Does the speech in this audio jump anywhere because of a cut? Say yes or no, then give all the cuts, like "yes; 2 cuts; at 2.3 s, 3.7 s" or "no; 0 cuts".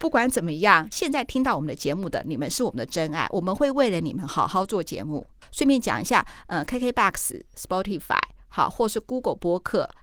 no; 0 cuts